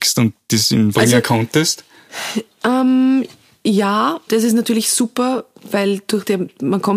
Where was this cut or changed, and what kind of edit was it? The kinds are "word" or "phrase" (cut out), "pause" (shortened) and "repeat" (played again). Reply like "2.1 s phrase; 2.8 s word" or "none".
0.9 s word; 4.3 s word